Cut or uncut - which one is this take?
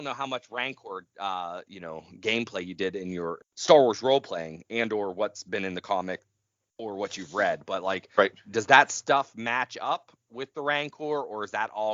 uncut